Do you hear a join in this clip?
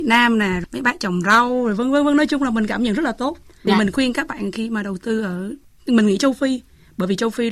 no; 0 cuts

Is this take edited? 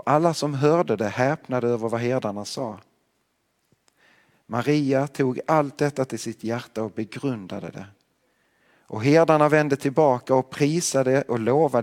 no; 0 cuts

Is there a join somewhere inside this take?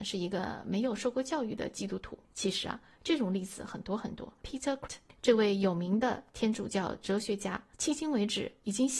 yes; 4 cuts; at 2.2 s, 4.4 s, 4.9 s, 7.7 s

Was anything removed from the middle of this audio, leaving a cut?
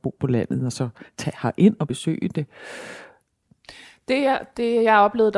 no; 0 cuts

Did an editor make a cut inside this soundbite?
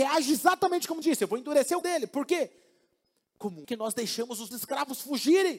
yes; 4 cuts; at 1.0 s, 1.8 s, 3.6 s, 4.5 s

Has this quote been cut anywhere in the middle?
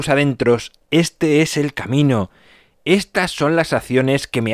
no; 0 cuts

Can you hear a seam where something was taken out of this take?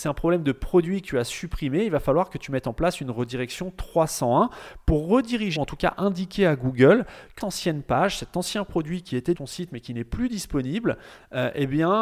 yes; 3 cuts; at 5.6 s, 7.4 s, 9.3 s

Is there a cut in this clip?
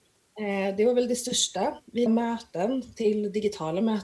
yes; 1 cut; at 2.1 s

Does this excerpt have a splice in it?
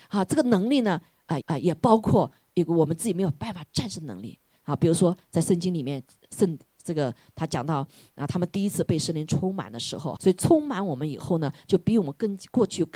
yes; 2 cuts; at 1.4 s, 10.2 s

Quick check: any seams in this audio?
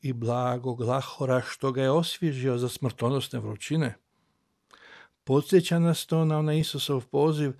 no; 0 cuts

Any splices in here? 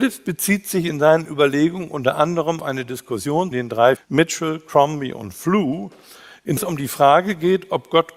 yes; 4 cuts; at 2.6 s, 3.5 s, 4.0 s, 6.6 s

